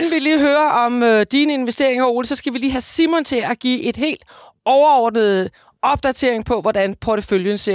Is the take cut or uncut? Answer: uncut